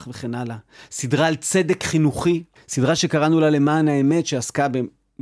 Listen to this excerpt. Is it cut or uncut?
cut